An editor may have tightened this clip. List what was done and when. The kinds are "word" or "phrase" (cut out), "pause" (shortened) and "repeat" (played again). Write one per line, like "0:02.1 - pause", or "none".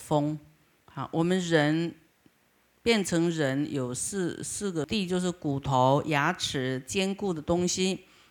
none

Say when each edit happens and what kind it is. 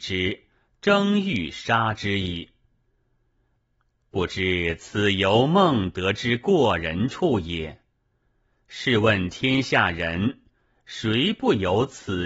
none

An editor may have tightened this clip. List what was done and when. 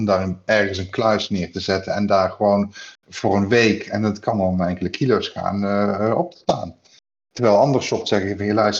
none

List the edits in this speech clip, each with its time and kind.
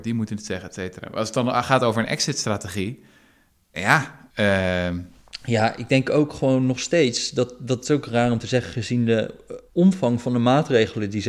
0:04.3 - pause
0:09.7 - pause

